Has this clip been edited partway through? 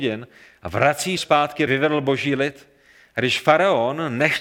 yes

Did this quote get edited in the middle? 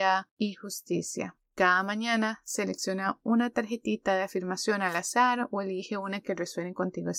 no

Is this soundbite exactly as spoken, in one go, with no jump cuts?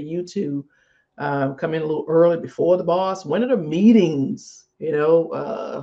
no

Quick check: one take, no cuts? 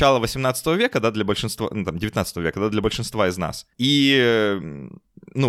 no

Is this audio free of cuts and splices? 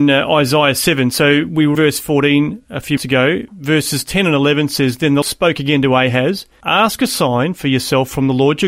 no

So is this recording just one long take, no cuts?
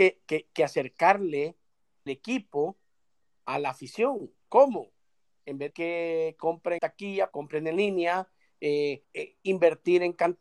no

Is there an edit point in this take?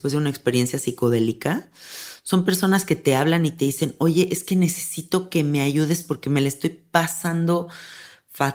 no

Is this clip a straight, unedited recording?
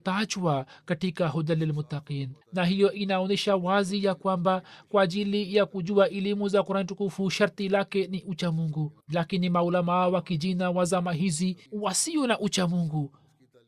no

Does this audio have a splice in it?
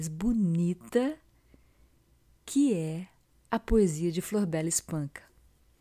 no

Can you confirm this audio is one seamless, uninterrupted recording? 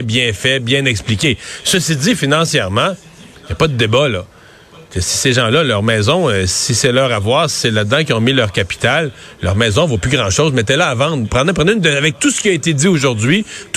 yes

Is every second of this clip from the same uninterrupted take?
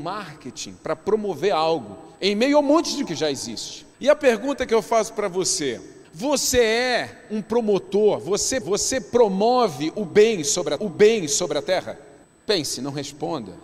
no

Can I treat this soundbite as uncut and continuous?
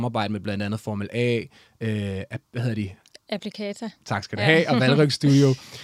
yes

